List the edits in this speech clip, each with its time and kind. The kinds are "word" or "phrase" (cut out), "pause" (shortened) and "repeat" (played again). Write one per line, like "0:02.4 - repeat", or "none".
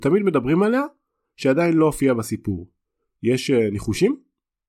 none